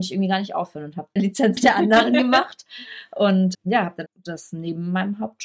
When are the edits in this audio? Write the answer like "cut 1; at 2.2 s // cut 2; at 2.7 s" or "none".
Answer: cut 1; at 1.2 s // cut 2; at 1.6 s // cut 3; at 3.5 s // cut 4; at 4.1 s